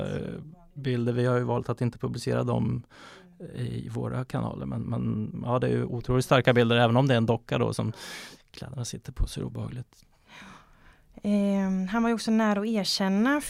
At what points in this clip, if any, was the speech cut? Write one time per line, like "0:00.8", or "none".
none